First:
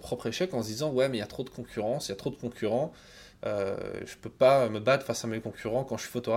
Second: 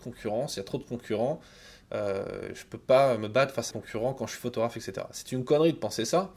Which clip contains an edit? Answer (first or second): second